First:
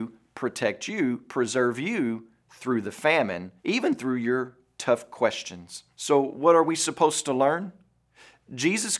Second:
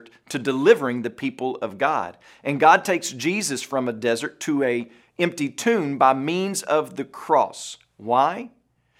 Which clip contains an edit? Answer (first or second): first